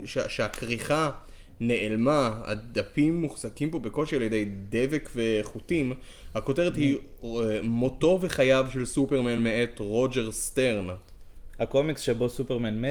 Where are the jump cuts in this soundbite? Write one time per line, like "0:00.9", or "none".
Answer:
none